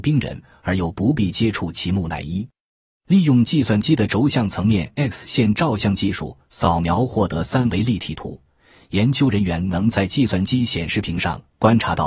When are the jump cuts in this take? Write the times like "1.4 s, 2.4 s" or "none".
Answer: none